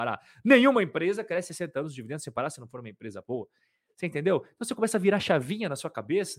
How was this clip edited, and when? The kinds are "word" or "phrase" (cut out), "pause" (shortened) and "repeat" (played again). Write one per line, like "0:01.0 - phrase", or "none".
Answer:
none